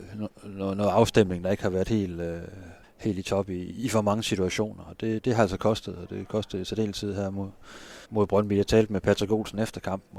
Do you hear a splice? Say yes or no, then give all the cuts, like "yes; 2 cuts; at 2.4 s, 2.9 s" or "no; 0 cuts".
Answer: yes; 2 cuts; at 2.8 s, 8.0 s